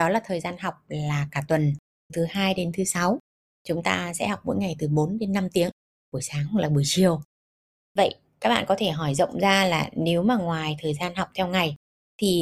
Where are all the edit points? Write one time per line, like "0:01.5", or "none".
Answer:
0:02.1